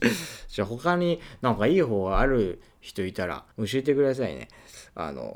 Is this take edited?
yes; 1 cut; at 3.5 s

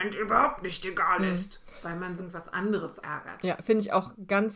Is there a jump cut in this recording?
yes; 2 cuts; at 2.2 s, 3.0 s

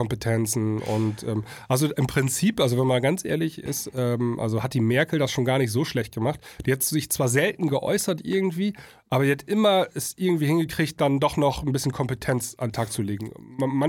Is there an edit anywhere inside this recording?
no; 0 cuts

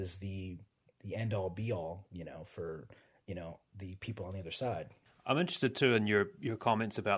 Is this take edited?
no; 0 cuts

